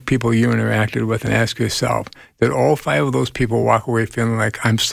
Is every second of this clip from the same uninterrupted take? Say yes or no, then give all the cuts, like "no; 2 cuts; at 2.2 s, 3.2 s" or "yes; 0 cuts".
yes; 0 cuts